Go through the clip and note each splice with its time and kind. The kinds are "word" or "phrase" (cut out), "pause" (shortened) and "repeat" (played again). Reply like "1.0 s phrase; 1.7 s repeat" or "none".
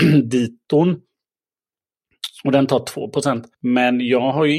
3.5 s pause